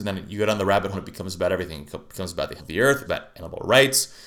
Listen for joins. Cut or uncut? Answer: cut